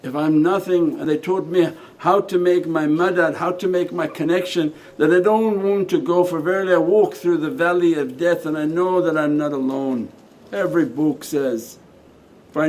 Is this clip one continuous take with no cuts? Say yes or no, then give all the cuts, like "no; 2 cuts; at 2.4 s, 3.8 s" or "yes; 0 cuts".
no; 2 cuts; at 1.0 s, 10.3 s